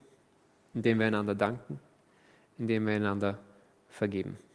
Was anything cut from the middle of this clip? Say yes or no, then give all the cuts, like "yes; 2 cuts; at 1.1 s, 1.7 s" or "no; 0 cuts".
no; 0 cuts